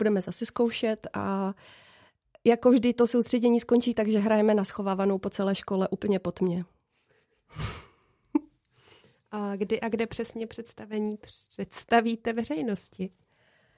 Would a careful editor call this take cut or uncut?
uncut